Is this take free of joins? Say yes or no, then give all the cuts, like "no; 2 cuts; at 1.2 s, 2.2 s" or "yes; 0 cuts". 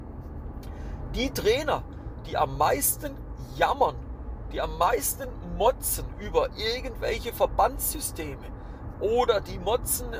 yes; 0 cuts